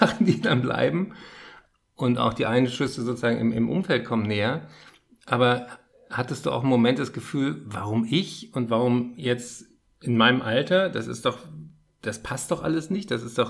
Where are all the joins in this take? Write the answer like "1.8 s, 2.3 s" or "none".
none